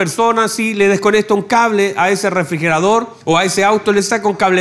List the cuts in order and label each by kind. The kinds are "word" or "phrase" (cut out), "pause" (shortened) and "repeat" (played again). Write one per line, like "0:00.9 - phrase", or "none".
0:03.2 - pause

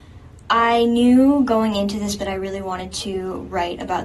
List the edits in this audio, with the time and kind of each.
0:02.2 - word

